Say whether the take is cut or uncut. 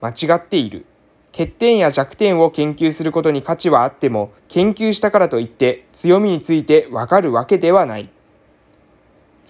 cut